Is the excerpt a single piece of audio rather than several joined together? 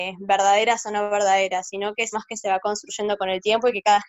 no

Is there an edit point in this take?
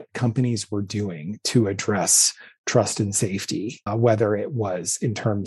yes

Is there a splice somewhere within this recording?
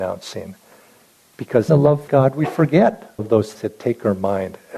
yes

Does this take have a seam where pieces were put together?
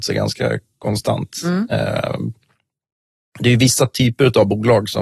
no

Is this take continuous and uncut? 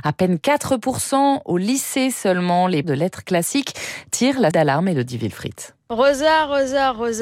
no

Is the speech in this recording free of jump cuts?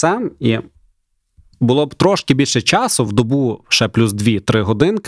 yes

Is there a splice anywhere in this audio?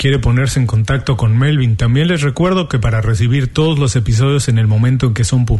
no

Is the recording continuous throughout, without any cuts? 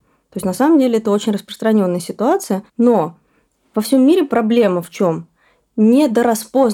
no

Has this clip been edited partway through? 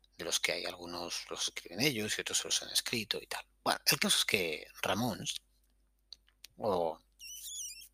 no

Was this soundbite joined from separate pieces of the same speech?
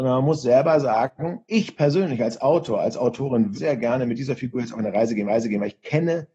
yes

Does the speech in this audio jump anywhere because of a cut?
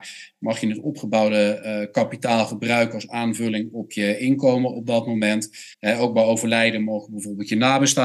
yes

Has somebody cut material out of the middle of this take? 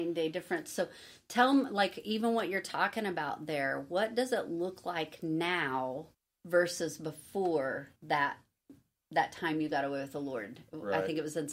yes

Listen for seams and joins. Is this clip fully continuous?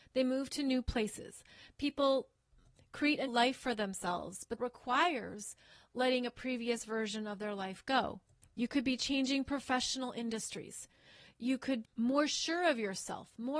no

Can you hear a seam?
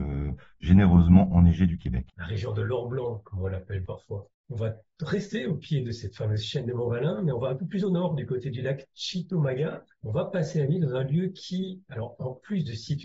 yes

